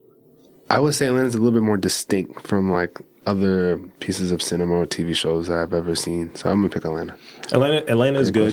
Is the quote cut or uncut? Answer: uncut